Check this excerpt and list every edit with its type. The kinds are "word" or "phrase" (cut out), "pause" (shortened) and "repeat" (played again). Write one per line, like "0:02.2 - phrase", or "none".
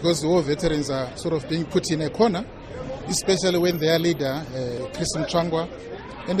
none